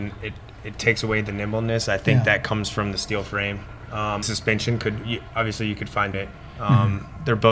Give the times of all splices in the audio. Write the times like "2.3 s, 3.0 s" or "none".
4.2 s, 6.1 s